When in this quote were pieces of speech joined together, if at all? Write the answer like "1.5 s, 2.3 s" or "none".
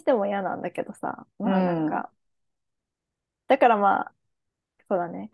1.3 s